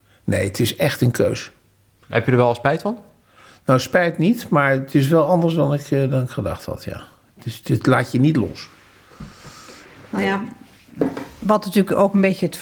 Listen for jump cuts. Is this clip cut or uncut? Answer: uncut